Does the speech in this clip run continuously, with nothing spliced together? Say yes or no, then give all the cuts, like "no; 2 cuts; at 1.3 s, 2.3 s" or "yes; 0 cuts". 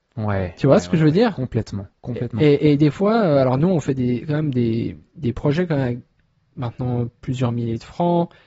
yes; 0 cuts